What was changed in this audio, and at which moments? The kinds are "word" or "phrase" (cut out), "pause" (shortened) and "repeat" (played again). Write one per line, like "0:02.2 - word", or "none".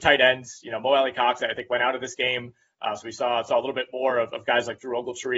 none